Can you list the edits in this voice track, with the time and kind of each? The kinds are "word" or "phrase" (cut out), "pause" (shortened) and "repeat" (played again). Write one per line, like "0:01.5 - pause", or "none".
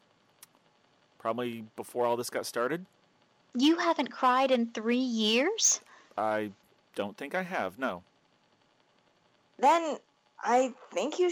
none